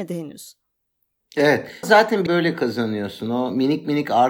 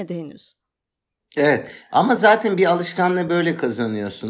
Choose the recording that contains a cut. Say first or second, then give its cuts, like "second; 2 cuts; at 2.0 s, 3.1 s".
first; 2 cuts; at 1.8 s, 2.3 s